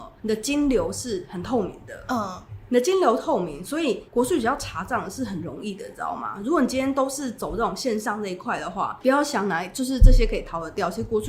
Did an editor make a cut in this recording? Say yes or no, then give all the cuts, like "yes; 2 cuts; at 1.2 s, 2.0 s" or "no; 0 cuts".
yes; 1 cut; at 4.1 s